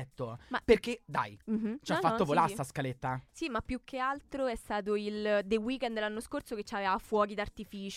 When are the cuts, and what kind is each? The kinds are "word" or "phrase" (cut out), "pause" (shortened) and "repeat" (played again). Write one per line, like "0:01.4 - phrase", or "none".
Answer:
0:01.4 - pause